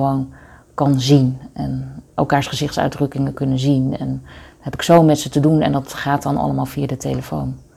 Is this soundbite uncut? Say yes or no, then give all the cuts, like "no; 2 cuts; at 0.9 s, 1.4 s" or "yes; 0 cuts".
yes; 0 cuts